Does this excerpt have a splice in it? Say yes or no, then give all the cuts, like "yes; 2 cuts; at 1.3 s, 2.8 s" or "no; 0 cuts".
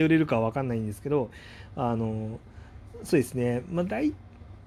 no; 0 cuts